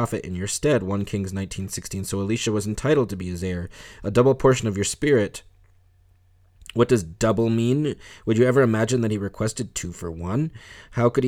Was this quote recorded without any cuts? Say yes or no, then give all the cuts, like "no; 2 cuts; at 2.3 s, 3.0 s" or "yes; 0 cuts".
yes; 0 cuts